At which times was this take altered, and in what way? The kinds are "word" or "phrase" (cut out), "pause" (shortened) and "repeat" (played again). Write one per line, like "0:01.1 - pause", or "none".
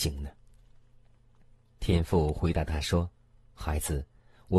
0:03.1 - pause